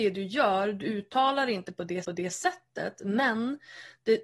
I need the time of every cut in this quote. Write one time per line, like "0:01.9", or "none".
0:02.0